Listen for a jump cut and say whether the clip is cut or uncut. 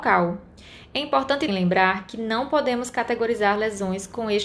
cut